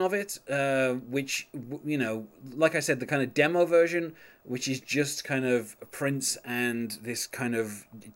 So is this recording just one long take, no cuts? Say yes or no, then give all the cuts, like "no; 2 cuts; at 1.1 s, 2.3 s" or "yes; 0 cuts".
yes; 0 cuts